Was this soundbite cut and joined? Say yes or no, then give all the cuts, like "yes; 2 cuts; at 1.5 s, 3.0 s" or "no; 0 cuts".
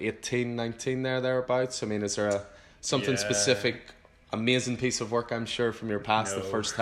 no; 0 cuts